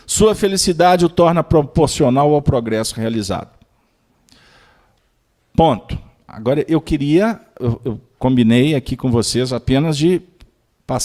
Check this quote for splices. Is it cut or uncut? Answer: uncut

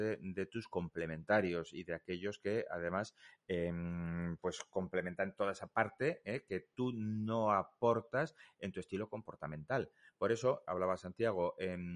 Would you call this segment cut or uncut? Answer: cut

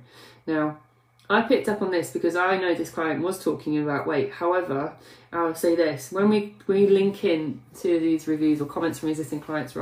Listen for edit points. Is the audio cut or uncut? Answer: uncut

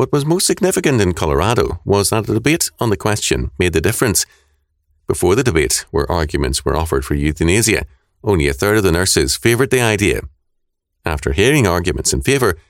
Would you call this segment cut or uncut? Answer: uncut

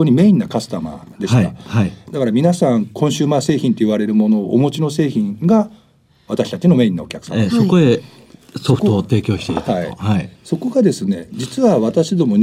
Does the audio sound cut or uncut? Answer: cut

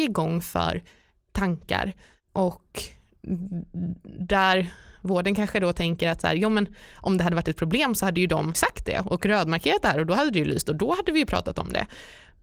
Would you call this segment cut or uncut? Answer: uncut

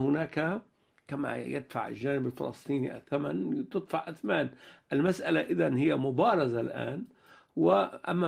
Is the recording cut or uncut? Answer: uncut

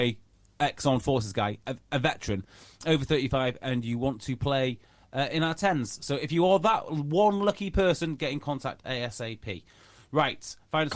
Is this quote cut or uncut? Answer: uncut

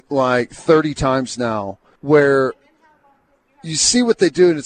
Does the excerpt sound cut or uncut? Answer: cut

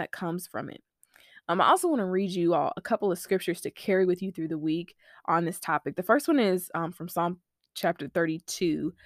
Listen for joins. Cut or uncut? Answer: uncut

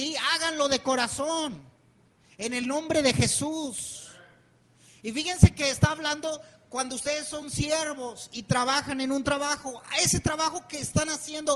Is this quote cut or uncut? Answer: uncut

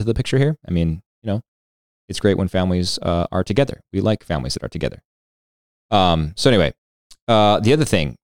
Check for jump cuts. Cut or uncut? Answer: uncut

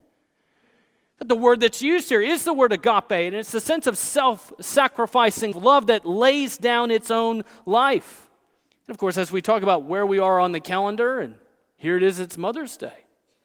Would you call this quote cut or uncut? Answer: cut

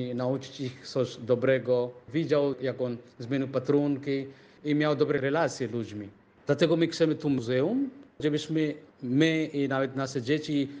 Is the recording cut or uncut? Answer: uncut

